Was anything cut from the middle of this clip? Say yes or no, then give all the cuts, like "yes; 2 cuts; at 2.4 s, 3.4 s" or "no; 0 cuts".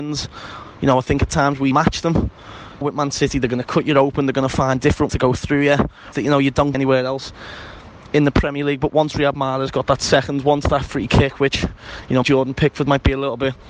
yes; 6 cuts; at 1.7 s, 2.8 s, 5.1 s, 6.1 s, 6.7 s, 12.2 s